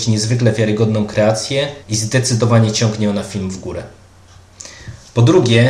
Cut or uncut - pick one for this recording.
cut